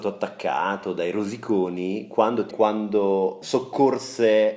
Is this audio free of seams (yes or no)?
no